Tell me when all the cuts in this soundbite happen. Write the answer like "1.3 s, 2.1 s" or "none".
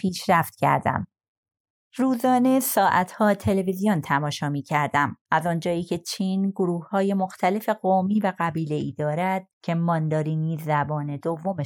5.2 s, 9.5 s

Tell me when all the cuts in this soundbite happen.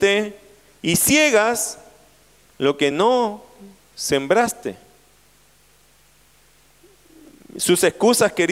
none

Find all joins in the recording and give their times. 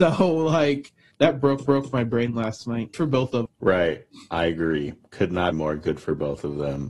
1.1 s, 1.7 s, 2.9 s, 3.5 s, 5.5 s

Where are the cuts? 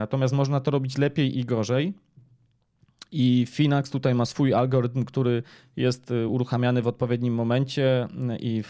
none

